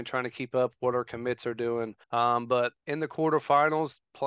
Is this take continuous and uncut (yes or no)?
no